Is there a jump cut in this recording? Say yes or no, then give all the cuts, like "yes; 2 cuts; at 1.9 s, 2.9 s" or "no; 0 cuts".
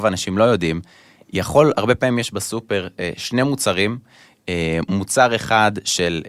no; 0 cuts